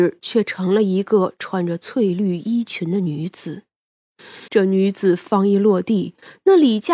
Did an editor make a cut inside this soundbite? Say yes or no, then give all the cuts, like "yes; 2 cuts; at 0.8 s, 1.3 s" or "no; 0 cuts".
yes; 1 cut; at 4.5 s